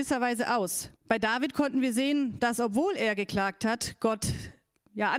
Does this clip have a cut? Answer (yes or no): yes